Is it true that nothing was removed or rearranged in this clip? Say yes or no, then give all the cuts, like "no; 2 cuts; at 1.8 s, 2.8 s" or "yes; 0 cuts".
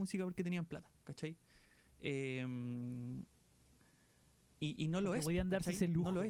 yes; 0 cuts